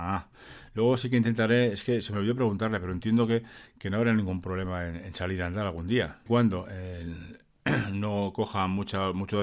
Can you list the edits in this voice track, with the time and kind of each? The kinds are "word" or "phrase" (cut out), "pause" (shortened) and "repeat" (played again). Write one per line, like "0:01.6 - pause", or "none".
0:06.3 - phrase